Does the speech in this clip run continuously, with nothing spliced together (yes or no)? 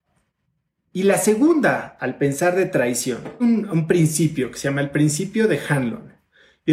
no